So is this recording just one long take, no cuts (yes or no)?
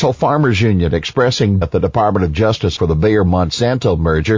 no